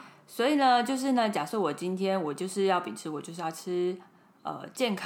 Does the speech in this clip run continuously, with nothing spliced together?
yes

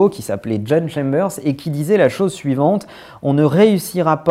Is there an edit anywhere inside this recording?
no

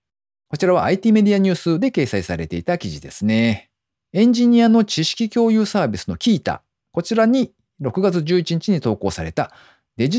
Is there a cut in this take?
yes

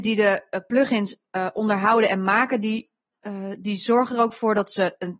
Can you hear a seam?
no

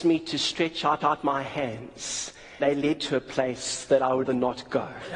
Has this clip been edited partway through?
yes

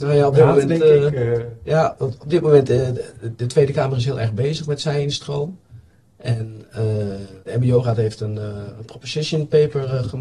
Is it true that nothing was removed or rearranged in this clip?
no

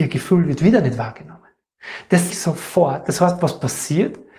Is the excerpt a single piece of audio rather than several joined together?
no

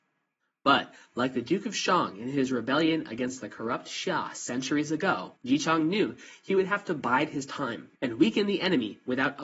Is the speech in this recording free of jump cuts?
no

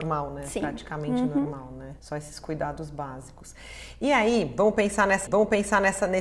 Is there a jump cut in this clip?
yes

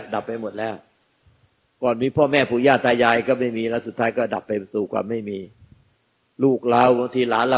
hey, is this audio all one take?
yes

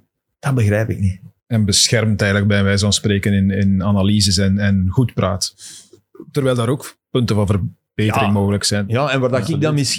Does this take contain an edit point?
yes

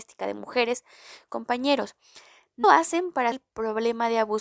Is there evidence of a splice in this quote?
yes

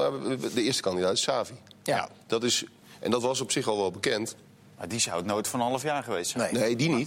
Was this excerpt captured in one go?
yes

